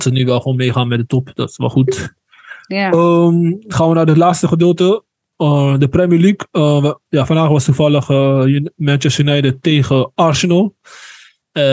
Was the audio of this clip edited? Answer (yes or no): no